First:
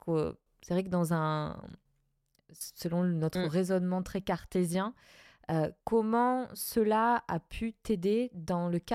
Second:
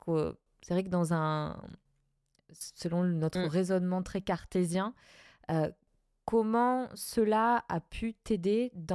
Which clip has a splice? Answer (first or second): first